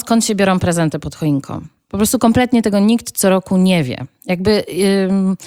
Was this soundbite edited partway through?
no; 0 cuts

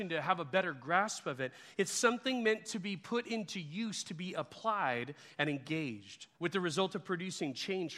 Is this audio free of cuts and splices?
no; 1 cut; at 6.3 s

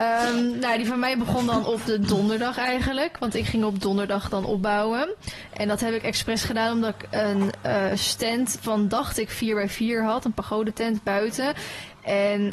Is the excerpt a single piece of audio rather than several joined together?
yes; 0 cuts

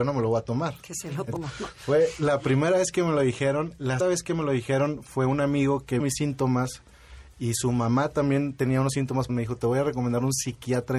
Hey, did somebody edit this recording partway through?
yes; 4 cuts; at 1.4 s, 4.0 s, 6.0 s, 9.3 s

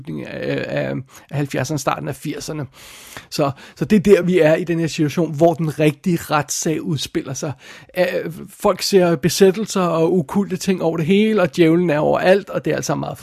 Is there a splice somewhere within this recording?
no; 0 cuts

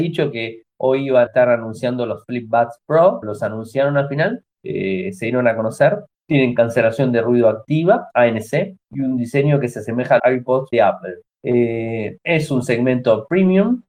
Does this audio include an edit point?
yes; 8 cuts; at 1.3 s, 3.2 s, 4.5 s, 6.1 s, 8.8 s, 10.2 s, 10.7 s, 11.3 s

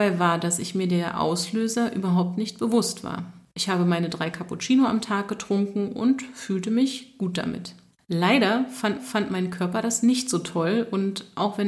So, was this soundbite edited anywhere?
yes; 1 cut; at 9.0 s

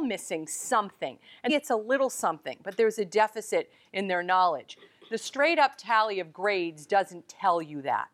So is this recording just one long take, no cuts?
no; 1 cut; at 1.5 s

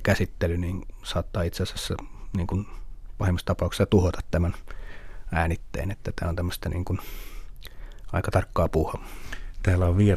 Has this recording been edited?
no; 0 cuts

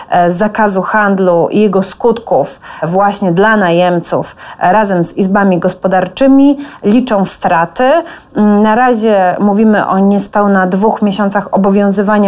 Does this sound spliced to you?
no; 0 cuts

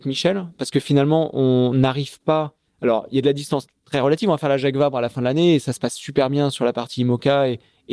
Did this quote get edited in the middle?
no; 0 cuts

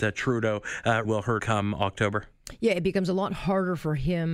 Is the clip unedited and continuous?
no; 2 cuts; at 1.1 s, 1.4 s

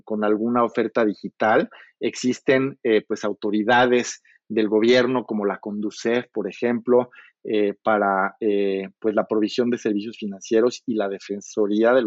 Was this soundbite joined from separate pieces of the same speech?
no; 0 cuts

